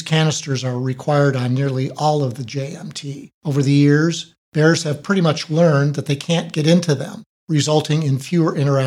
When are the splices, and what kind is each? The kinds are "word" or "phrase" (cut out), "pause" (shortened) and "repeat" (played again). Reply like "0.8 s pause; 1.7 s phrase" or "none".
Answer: 3.4 s pause; 4.4 s pause; 7.3 s pause